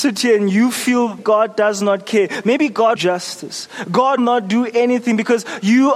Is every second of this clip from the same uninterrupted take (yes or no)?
no